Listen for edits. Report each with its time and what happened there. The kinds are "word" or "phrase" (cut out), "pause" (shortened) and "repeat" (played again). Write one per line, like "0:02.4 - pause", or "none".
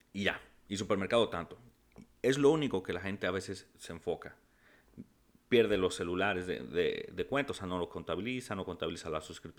none